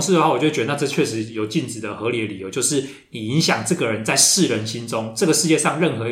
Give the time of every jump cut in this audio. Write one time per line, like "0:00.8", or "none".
none